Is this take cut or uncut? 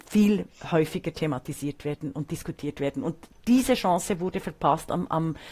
uncut